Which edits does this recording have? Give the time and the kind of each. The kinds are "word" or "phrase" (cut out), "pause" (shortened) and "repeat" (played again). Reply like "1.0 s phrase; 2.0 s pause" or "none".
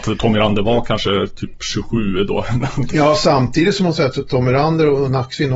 none